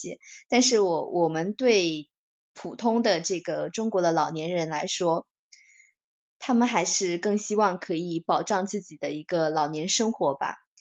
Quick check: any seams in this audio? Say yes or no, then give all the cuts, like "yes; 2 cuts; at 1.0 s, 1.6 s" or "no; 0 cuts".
no; 0 cuts